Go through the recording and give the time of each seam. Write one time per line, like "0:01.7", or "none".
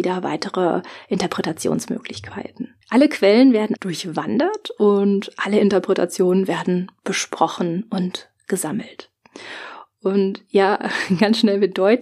0:02.8
0:03.8